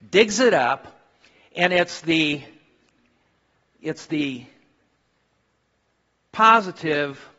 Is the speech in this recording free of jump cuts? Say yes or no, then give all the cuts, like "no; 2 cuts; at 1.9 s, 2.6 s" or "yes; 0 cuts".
yes; 0 cuts